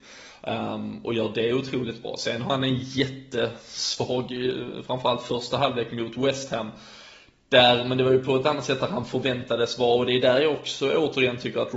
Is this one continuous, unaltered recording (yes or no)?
yes